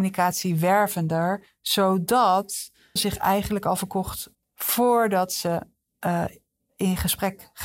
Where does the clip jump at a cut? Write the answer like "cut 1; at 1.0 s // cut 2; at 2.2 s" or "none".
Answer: cut 1; at 3.0 s // cut 2; at 4.3 s